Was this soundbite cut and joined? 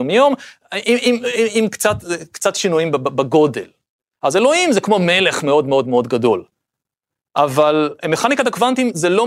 no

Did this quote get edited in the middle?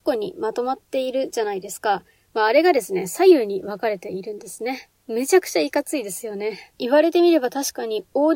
yes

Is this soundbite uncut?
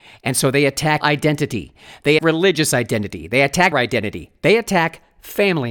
no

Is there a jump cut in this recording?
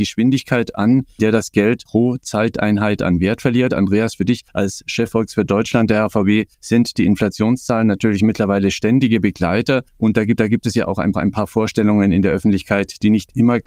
yes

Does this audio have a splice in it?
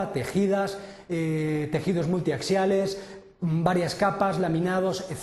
no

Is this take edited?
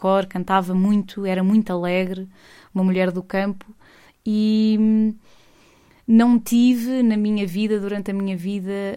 no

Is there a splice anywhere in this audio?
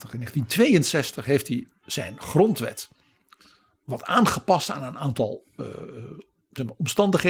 no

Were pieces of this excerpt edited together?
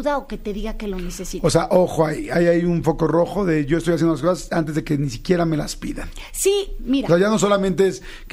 no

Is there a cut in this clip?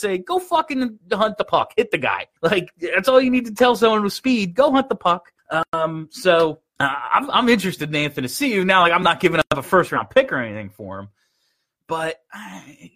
yes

